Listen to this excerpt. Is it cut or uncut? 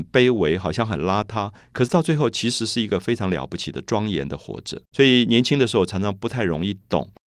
cut